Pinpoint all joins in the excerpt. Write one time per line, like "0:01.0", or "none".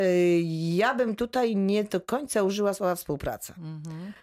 none